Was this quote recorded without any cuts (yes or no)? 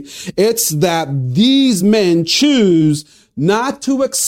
yes